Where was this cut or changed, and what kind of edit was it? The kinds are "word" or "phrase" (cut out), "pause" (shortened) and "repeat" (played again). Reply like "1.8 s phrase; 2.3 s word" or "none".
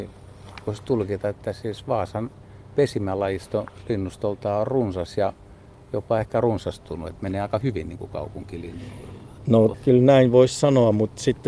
none